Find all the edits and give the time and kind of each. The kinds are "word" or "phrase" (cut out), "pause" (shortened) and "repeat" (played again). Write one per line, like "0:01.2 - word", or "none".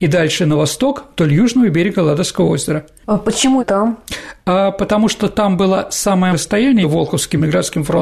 0:03.6 - word
0:06.3 - word
0:06.8 - word

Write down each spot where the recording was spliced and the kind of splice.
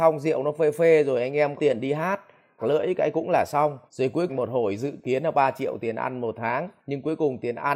0:01.6 - word
0:02.6 - phrase
0:03.9 - pause
0:04.3 - phrase
0:06.8 - pause

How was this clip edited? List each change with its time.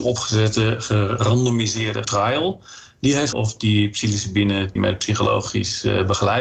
0:02.0 - word
0:03.3 - word
0:04.8 - word

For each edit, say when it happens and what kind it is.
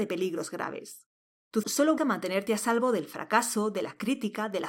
0:01.6 - word
0:02.0 - word

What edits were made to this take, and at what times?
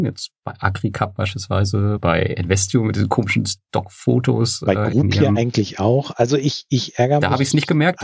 0:02.0 - word

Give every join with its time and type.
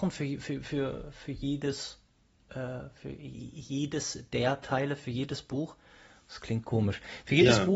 none

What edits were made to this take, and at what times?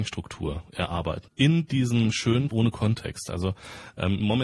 0:01.3 - word
0:02.5 - word

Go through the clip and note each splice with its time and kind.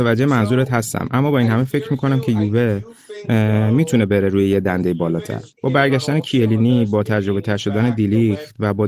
0:05.5 - pause

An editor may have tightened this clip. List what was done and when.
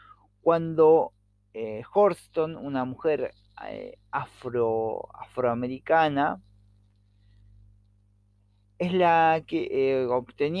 none

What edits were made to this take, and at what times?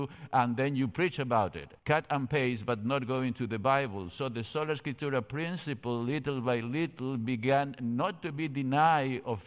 0:01.8 - pause

